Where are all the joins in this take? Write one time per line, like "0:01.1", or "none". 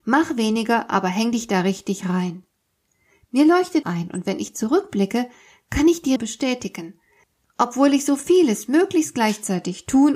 0:03.8
0:06.2

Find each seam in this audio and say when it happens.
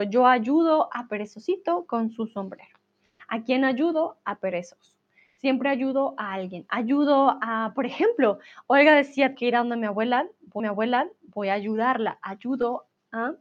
0:09.3
0:10.6

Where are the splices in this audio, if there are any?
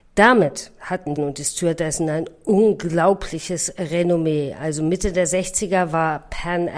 0:01.2

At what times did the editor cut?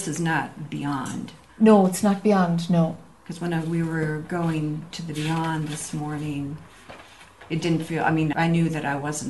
0:08.3

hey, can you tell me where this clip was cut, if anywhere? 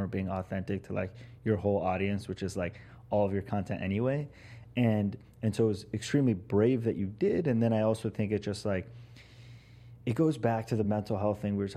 none

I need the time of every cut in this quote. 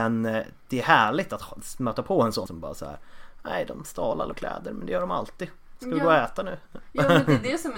0:02.5
0:04.3

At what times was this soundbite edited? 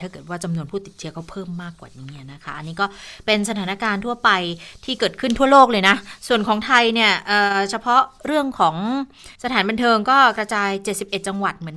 0:09.4

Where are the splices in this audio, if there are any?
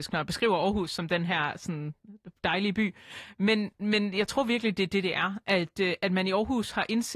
none

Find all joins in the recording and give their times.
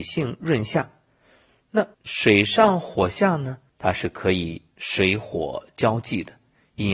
0:01.9
0:03.7
0:04.7

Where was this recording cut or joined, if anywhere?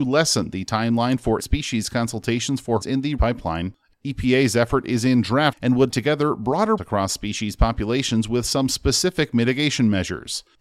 0:01.4
0:02.8
0:03.2
0:05.5
0:05.9
0:06.8

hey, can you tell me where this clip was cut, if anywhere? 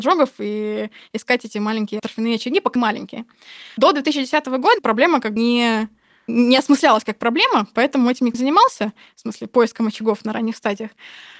0:02.8
0:04.8
0:05.4
0:08.3

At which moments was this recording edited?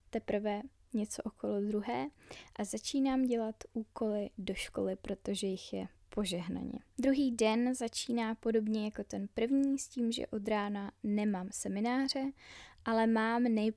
0:06.9

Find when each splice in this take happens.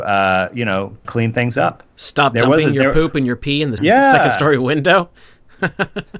0:01.0
0:03.8

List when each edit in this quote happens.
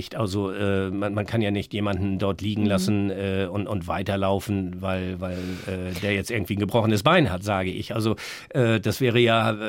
none

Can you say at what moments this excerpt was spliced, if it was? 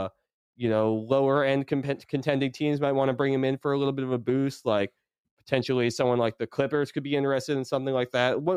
none

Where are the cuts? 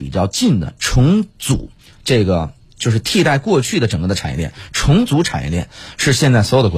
none

